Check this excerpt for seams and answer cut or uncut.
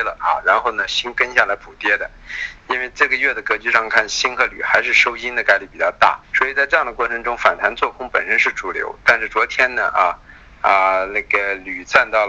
cut